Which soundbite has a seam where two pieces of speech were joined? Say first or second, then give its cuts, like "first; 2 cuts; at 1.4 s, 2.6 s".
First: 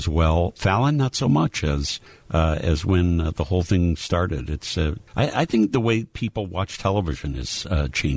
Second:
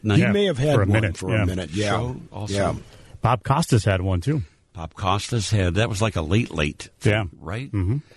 first; 2 cuts; at 2.1 s, 5.1 s